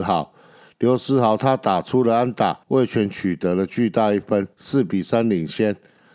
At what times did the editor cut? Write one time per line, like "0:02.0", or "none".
0:02.6
0:04.5

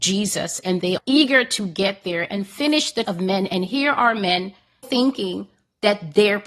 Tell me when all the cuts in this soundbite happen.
0:01.0
0:03.0
0:04.8

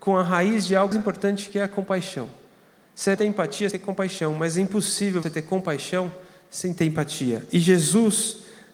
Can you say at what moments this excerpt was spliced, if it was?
0:00.9
0:03.2
0:03.7
0:05.2

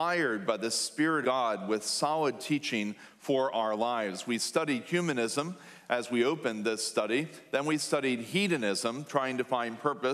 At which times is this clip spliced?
0:01.2

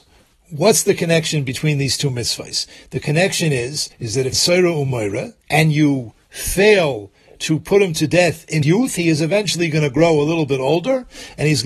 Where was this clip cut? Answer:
0:03.9
0:04.3
0:05.4
0:08.6

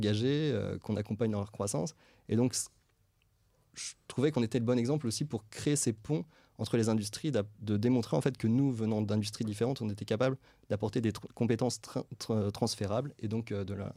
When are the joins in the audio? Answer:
none

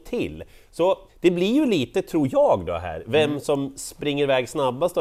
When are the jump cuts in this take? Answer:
0:01.1

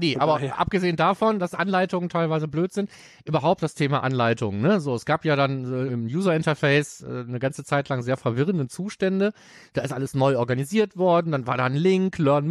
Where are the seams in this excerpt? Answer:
0:05.9

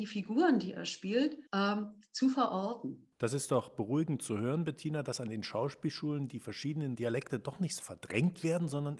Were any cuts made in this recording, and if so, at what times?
0:01.5
0:03.1
0:07.8

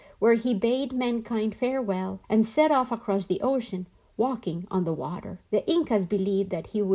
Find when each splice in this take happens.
0:02.2
0:05.5

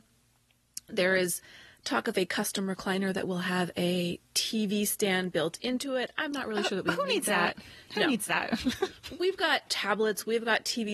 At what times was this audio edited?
0:04.3

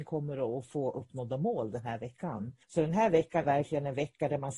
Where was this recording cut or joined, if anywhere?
0:02.6
0:03.4

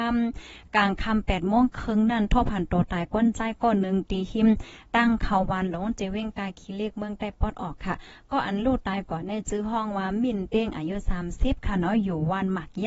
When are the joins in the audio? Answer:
none

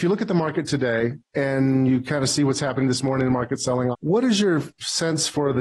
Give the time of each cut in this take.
0:01.2
0:03.9

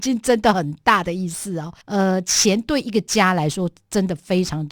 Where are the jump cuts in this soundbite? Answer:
0:01.8

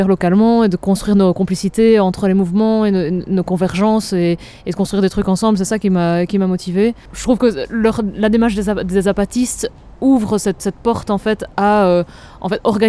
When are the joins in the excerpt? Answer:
0:07.0
0:10.6

